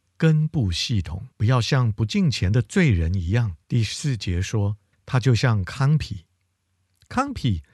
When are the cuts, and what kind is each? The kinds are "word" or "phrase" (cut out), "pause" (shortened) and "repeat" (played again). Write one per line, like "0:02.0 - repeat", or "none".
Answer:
0:01.3 - pause
0:03.6 - pause
0:04.9 - pause

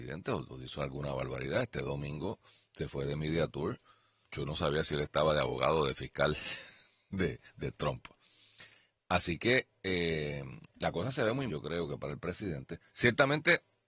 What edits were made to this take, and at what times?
0:04.2 - word
0:10.7 - pause
0:11.5 - word

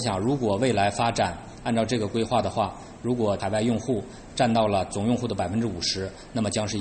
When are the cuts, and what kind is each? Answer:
0:03.4 - word

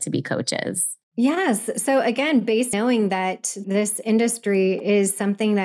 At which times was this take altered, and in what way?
0:01.0 - pause
0:02.7 - word
0:03.6 - word

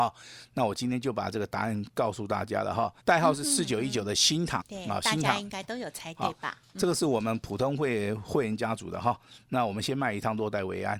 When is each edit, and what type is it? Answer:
0:03.0 - pause
0:04.6 - word

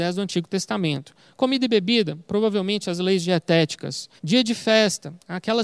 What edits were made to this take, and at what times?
0:04.2 - pause

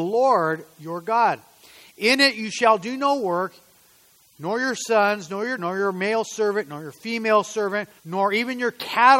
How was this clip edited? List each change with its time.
0:05.6 - word
0:08.0 - pause

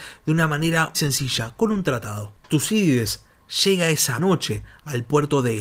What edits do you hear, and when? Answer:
0:00.9 - word
0:02.4 - pause
0:04.2 - word

